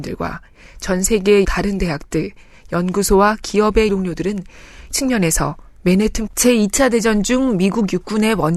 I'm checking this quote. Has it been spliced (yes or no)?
yes